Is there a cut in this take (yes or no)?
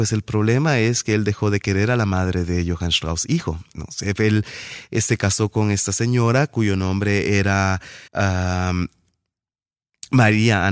yes